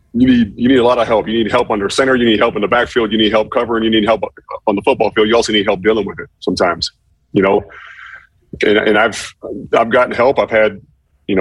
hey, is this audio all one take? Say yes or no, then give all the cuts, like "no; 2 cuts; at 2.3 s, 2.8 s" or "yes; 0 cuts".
yes; 0 cuts